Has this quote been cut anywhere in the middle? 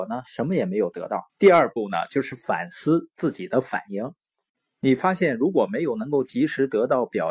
yes; 1 cut; at 1.3 s

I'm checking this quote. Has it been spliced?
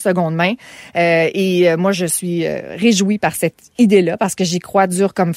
no; 0 cuts

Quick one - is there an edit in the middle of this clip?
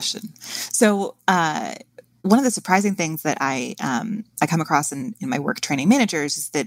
no; 0 cuts

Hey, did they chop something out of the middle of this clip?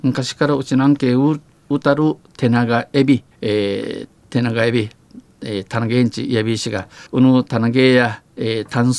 yes; 2 cuts; at 3.3 s, 7.1 s

